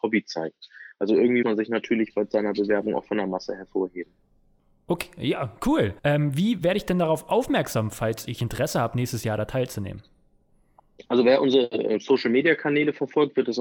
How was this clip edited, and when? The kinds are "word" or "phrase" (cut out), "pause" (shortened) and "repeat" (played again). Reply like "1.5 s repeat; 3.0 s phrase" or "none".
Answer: 1.4 s word; 6.0 s pause